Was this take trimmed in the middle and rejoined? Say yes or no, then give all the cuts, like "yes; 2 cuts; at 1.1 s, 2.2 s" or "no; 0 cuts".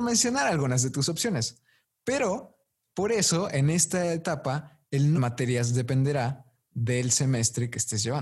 yes; 1 cut; at 5.1 s